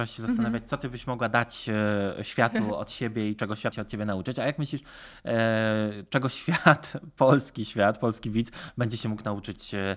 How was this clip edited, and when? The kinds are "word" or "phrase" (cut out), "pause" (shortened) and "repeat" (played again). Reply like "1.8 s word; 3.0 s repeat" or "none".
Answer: 3.7 s word